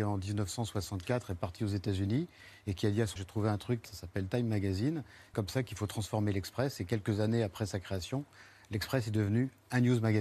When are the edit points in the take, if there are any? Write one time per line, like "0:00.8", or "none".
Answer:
0:03.2
0:03.8
0:05.3

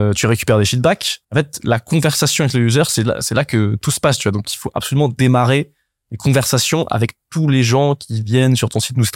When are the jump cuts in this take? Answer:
0:01.2

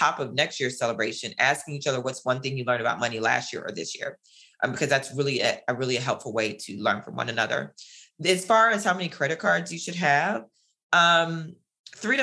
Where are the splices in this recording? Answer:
none

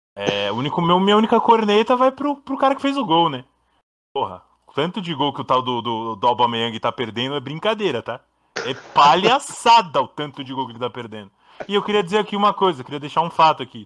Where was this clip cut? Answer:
none

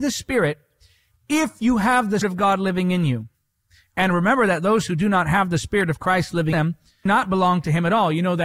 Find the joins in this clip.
0:02.2
0:06.5
0:07.1

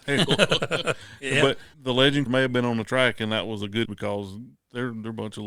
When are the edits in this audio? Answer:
0:01.7
0:02.3
0:03.8

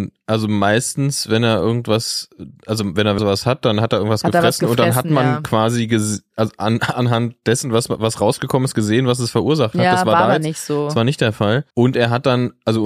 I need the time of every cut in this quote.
0:03.2
0:11.7

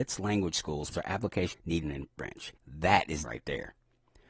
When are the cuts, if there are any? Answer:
0:00.9
0:01.5
0:01.8
0:02.6
0:03.2

